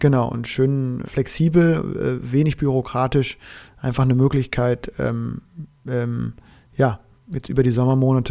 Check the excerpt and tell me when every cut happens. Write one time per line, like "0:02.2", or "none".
0:01.0